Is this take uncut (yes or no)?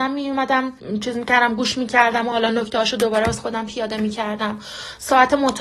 yes